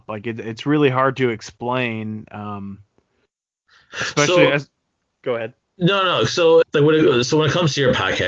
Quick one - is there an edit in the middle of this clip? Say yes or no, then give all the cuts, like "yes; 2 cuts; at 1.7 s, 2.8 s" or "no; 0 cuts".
yes; 1 cut; at 6.6 s